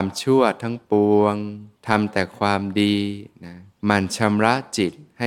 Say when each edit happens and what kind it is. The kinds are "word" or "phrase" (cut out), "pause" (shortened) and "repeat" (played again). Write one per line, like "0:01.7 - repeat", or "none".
0:01.8 - pause
0:03.7 - pause